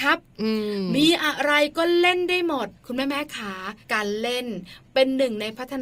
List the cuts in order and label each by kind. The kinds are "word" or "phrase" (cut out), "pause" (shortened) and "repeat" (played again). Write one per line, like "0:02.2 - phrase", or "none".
0:02.8 - pause
0:03.8 - pause

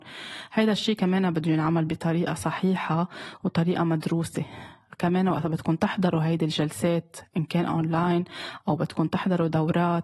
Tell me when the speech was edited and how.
none

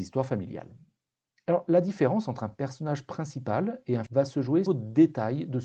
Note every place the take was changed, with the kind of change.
0:04.1 - word
0:04.7 - phrase

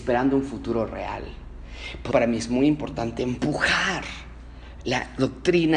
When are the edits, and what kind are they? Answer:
0:02.1 - word

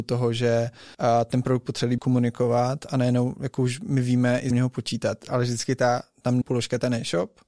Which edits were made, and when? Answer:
0:00.9 - pause
0:02.0 - word
0:04.5 - phrase
0:06.4 - word

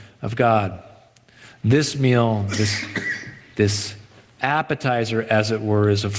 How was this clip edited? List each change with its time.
none

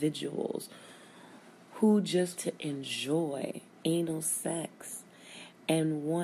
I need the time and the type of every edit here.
0:02.4 - word
0:03.8 - pause

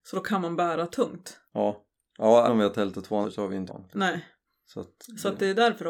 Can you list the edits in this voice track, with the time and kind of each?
0:01.5 - pause
0:02.5 - word
0:03.2 - word
0:03.7 - phrase
0:04.5 - pause

